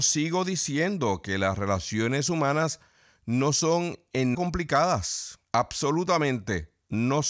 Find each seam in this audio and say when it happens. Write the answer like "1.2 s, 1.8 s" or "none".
4.3 s, 5.4 s